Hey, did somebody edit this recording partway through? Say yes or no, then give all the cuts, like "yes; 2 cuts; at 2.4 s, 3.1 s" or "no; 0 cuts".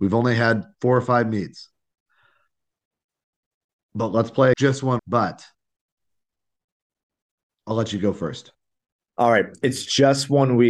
yes; 2 cuts; at 4.5 s, 5.0 s